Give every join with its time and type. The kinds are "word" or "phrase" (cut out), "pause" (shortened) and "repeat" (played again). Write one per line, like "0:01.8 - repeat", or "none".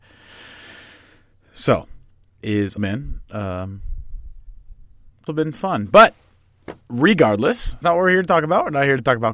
0:02.4 - word
0:02.8 - word
0:05.3 - word
0:07.8 - word

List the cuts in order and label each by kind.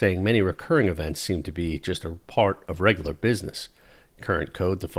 none

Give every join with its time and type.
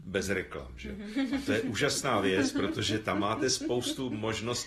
none

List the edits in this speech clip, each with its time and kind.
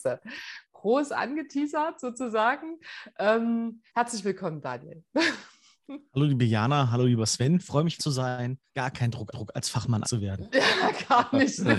0:03.9 - pause
0:08.0 - phrase
0:08.7 - pause
0:09.3 - repeat
0:10.0 - word

